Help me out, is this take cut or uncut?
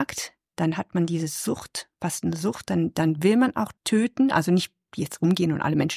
cut